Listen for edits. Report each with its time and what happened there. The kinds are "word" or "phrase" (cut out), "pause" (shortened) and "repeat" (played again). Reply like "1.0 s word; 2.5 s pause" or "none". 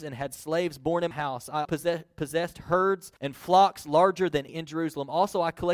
1.1 s word; 1.6 s word; 3.2 s pause; 4.5 s phrase